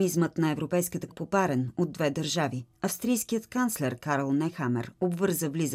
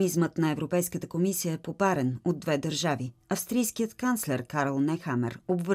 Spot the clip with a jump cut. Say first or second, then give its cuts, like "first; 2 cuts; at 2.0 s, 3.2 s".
first; 1 cut; at 1.1 s